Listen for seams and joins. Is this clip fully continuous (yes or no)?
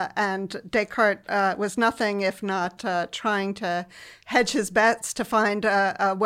yes